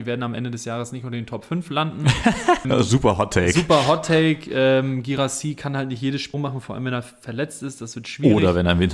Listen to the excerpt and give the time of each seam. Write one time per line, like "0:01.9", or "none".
0:02.6
0:06.3